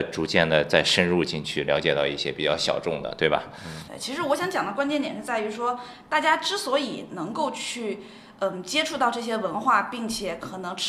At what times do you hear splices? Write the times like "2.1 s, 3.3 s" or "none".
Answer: 3.9 s